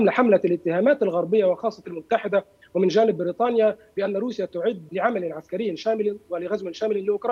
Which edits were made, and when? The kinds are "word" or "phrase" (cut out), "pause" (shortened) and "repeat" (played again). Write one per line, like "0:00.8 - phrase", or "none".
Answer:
0:01.8 - phrase
0:04.9 - word